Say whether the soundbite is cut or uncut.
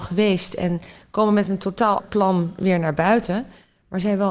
cut